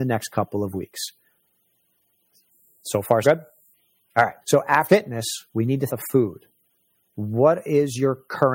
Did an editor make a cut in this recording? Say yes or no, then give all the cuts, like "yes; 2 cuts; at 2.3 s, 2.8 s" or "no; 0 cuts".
yes; 4 cuts; at 3.2 s, 4.4 s, 4.9 s, 5.9 s